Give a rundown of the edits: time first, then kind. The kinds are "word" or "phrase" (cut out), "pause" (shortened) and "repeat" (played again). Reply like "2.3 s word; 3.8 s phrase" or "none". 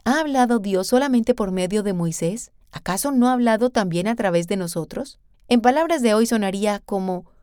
2.6 s pause; 5.3 s pause

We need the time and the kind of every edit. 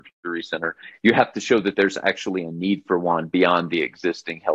none

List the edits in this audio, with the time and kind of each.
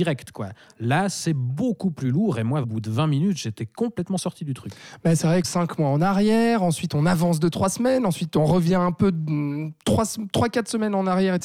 2.6 s word; 5.4 s phrase

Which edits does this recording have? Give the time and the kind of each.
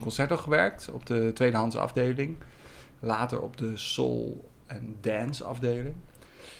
none

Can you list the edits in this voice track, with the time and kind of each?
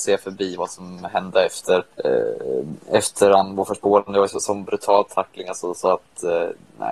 1.9 s pause

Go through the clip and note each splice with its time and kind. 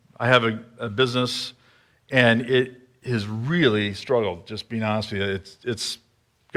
none

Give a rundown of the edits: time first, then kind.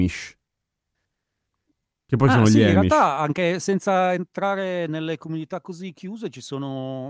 0.9 s pause

